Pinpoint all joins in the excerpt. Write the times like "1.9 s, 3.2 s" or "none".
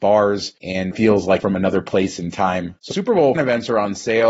0.9 s, 1.4 s, 2.9 s, 3.3 s